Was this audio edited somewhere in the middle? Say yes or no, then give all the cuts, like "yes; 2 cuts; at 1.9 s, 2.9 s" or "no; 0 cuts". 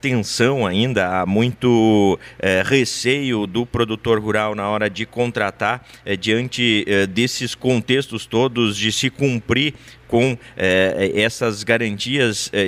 no; 0 cuts